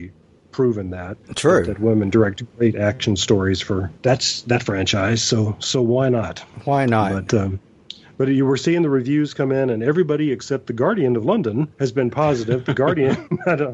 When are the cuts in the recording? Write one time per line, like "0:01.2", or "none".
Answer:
0:01.2
0:04.0
0:11.7